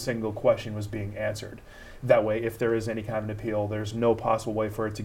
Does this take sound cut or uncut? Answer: uncut